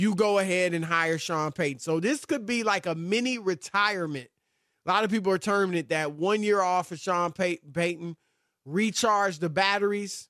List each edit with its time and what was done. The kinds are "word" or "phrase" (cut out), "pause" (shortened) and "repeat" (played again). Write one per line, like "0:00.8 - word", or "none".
none